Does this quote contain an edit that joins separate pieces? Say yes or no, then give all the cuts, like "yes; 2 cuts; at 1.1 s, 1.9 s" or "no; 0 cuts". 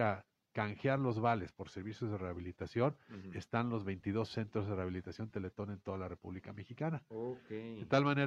no; 0 cuts